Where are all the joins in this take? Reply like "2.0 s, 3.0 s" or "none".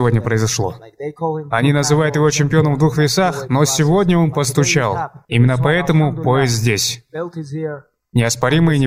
none